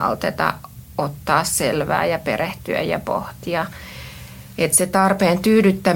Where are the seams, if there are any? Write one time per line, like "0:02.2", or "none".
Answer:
none